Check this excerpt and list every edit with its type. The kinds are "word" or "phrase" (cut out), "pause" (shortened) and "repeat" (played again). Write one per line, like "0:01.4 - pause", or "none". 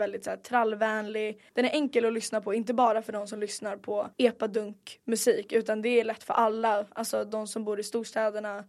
0:01.5 - pause
0:04.1 - pause